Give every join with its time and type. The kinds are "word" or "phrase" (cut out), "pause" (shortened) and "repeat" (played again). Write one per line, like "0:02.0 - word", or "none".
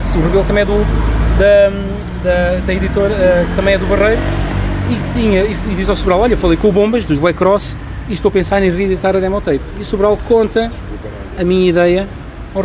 none